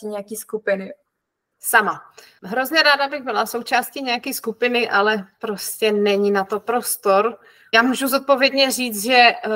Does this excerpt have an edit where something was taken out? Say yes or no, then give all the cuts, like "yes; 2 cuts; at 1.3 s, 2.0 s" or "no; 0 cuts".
no; 0 cuts